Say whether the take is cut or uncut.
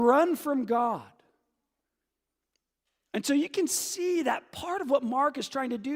uncut